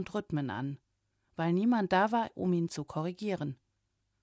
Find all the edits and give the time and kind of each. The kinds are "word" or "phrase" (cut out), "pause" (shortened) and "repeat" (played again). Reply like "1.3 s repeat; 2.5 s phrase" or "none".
none